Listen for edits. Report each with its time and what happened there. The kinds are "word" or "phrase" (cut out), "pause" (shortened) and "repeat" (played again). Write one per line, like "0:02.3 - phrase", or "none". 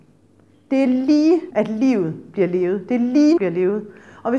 0:01.5 - word
0:03.4 - phrase